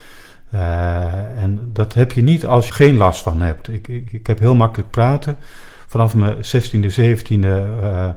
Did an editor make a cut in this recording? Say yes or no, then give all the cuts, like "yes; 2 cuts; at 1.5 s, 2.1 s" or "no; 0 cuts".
yes; 1 cut; at 2.7 s